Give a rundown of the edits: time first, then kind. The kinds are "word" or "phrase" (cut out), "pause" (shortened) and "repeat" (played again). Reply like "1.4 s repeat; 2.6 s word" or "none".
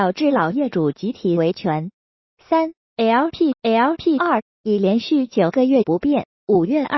3.5 s repeat